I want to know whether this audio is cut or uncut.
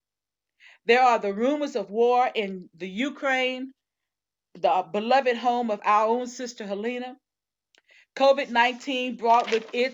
uncut